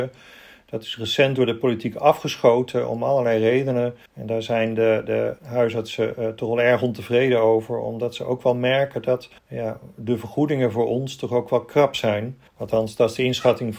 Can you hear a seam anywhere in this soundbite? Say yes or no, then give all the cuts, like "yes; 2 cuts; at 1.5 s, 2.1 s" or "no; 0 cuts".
yes; 4 cuts; at 4.1 s, 5.4 s, 9.4 s, 12.5 s